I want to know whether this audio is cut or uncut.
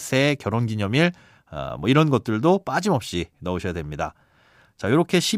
uncut